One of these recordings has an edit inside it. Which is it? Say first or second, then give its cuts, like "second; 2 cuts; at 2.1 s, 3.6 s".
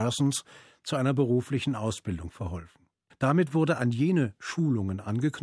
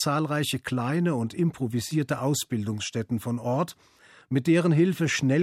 first; 1 cut; at 3.1 s